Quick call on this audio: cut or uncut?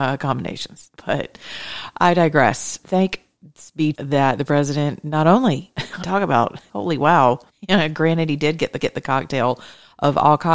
cut